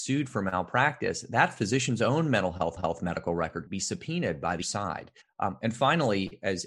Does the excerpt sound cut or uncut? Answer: cut